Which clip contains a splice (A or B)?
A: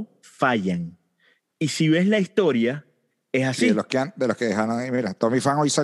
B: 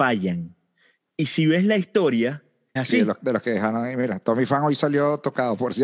B